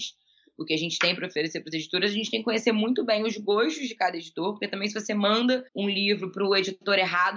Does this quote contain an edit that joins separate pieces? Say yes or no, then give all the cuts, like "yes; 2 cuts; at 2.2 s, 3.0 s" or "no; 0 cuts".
yes; 1 cut; at 5.7 s